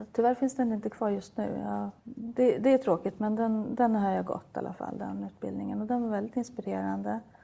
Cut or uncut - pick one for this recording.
cut